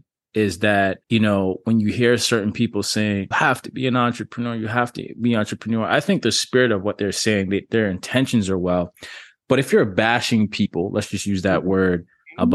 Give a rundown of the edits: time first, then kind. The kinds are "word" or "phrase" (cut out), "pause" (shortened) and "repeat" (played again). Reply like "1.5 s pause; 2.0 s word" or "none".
1.0 s pause; 3.3 s phrase